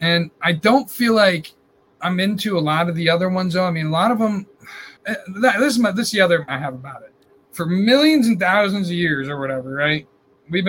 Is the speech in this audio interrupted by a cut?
yes; 4 cuts; at 1.9 s, 5.0 s, 6.5 s, 7.3 s

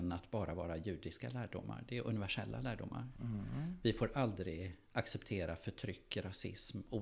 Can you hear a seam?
no; 0 cuts

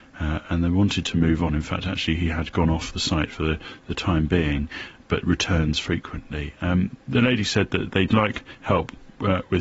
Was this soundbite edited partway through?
no; 0 cuts

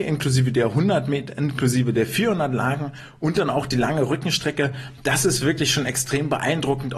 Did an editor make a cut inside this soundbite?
no; 0 cuts

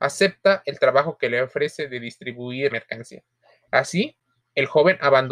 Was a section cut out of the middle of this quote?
yes; 2 cuts; at 2.7 s, 3.4 s

